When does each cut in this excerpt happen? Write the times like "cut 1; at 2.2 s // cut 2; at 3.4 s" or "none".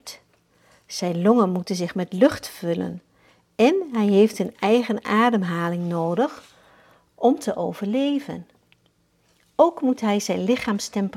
none